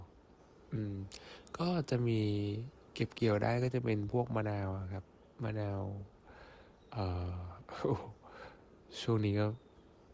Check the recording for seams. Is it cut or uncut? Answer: uncut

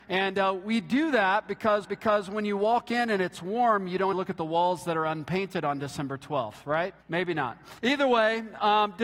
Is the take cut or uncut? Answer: cut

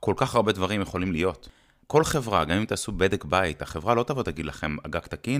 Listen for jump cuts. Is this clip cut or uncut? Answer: uncut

